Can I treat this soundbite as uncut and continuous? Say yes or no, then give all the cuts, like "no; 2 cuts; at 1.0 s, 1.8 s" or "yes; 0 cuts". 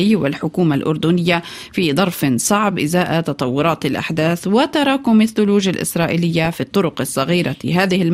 yes; 0 cuts